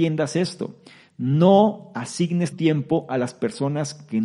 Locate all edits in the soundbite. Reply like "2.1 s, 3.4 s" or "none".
2.5 s